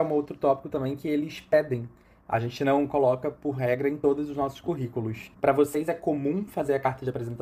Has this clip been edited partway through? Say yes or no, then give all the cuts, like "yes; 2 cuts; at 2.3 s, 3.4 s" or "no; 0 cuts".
yes; 1 cut; at 5.3 s